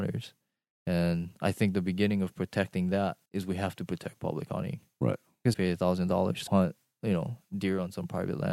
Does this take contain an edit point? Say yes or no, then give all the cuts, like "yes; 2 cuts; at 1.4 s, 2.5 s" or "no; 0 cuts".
yes; 3 cuts; at 3.3 s, 5.5 s, 6.5 s